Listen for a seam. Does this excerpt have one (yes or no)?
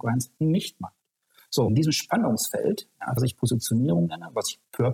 yes